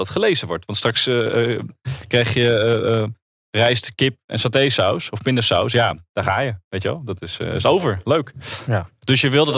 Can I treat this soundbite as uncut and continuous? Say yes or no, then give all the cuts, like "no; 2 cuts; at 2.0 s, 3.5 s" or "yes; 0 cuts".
yes; 0 cuts